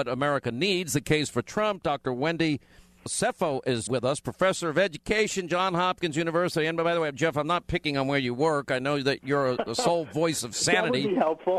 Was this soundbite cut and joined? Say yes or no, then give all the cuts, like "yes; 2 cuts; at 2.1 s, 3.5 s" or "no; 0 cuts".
yes; 2 cuts; at 3.1 s, 3.9 s